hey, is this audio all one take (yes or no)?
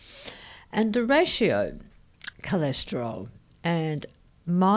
no